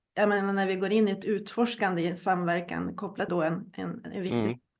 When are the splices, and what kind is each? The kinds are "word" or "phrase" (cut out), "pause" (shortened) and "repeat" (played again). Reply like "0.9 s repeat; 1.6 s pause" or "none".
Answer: 3.3 s word